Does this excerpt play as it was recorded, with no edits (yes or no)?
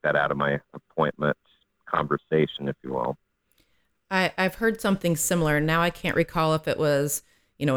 yes